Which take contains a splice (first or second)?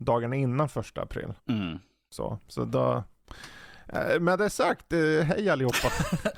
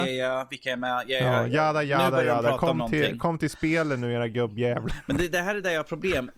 first